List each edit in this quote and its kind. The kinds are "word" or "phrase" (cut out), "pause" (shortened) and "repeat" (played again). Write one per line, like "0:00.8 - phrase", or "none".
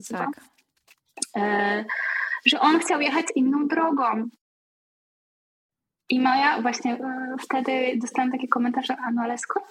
none